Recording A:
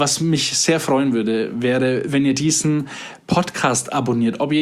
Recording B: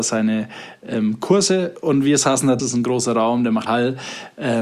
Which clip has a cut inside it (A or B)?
B